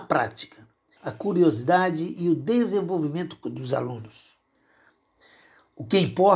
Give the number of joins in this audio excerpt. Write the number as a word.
two